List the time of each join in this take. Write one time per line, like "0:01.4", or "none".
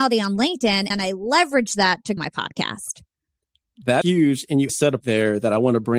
0:00.9
0:02.2
0:04.0
0:04.7
0:05.0